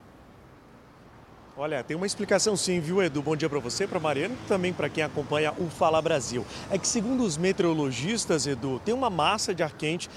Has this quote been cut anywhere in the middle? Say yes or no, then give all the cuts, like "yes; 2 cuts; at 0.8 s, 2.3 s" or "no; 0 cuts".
no; 0 cuts